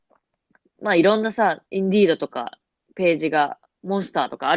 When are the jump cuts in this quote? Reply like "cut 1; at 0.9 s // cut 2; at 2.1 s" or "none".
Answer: cut 1; at 1.6 s